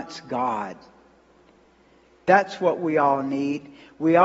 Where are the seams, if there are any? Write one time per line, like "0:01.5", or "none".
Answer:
none